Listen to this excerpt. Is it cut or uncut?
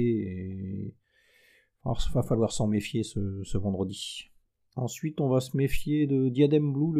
uncut